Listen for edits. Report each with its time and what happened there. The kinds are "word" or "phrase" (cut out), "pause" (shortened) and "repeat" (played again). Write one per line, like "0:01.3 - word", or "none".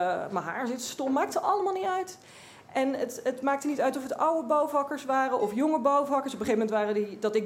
none